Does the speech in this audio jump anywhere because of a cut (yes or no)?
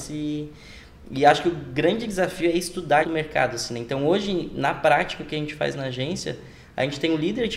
yes